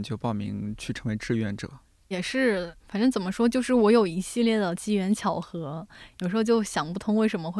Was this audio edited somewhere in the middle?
yes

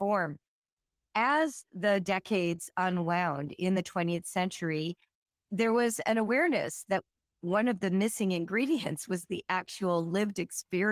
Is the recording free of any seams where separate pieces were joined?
yes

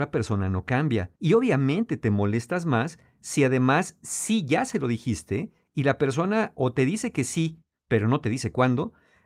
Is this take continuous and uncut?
no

